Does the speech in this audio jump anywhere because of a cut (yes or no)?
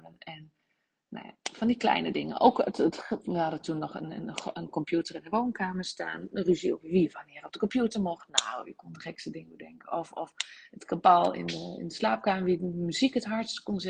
no